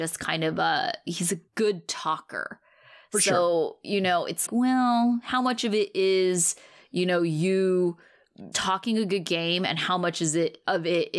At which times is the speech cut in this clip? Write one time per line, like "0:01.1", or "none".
0:01.5
0:04.5
0:08.5